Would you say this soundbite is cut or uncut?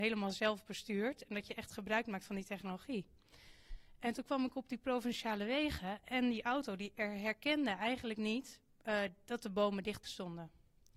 cut